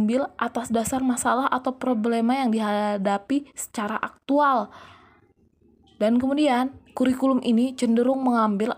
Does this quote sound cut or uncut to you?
uncut